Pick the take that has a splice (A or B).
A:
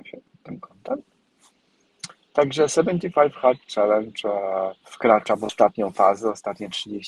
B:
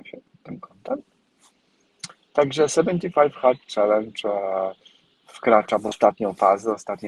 A